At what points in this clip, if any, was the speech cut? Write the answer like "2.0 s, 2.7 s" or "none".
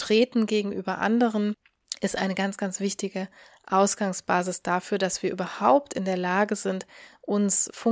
none